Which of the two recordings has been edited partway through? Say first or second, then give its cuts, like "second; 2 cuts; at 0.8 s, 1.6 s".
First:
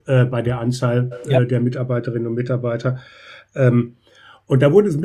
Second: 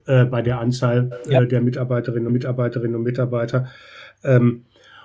second; 1 cut; at 2.3 s